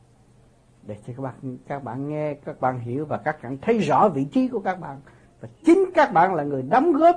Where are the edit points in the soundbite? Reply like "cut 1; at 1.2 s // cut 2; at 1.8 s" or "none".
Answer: none